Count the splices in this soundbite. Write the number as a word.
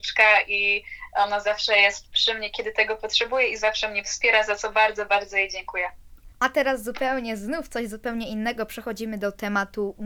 one